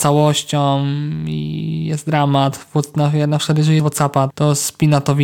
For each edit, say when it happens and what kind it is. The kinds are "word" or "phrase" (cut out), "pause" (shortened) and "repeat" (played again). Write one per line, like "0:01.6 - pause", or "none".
0:03.8 - phrase
0:04.3 - word